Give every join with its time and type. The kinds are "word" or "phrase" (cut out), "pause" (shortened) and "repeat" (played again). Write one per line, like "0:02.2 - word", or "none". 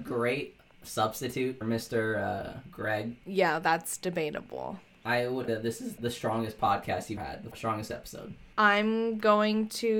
0:01.6 - word
0:05.5 - word
0:06.0 - word
0:07.2 - word
0:07.5 - word